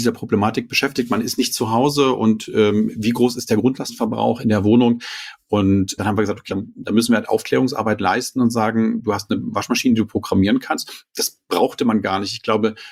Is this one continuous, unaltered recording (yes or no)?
no